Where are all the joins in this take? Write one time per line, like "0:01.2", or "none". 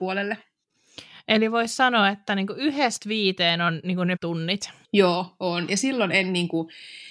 0:04.2
0:04.8